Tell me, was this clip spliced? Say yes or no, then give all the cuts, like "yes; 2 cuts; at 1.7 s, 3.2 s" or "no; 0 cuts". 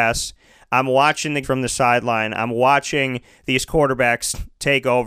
yes; 1 cut; at 1.4 s